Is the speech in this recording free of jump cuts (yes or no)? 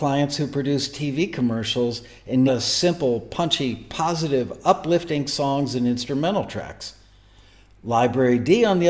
no